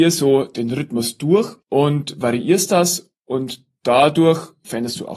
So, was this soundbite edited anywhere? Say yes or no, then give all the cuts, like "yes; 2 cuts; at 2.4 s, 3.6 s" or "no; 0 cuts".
yes; 1 cut; at 1.6 s